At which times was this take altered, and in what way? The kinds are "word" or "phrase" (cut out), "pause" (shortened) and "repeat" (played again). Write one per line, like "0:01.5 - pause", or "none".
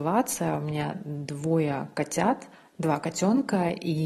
0:02.5 - pause